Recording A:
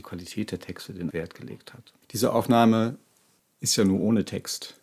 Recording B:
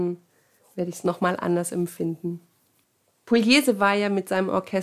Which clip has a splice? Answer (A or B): A